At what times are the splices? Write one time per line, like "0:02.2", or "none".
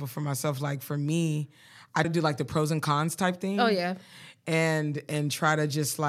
0:02.0